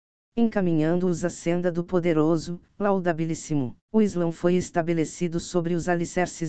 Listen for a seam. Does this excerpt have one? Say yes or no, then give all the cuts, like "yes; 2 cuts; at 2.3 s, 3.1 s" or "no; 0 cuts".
yes; 1 cut; at 3.9 s